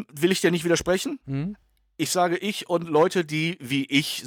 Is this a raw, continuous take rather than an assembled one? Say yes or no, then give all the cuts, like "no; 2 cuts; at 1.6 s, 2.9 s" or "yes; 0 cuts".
yes; 0 cuts